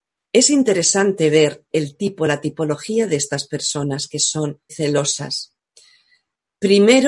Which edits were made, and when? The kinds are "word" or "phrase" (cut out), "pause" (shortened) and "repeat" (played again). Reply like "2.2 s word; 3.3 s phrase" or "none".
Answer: 1.7 s word; 4.7 s word

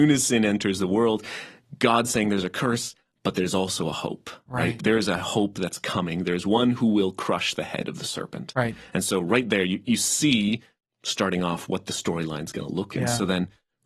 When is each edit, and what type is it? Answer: 4.8 s word; 12.9 s word

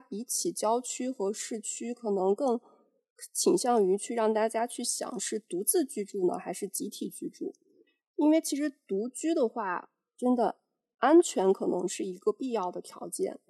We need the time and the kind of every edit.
none

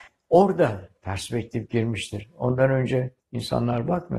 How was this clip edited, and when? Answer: 3.2 s pause

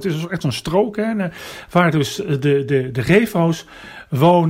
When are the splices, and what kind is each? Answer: none

